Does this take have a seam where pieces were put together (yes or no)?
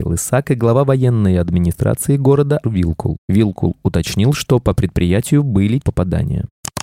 yes